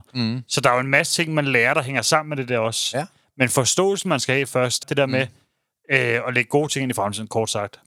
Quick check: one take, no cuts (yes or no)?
no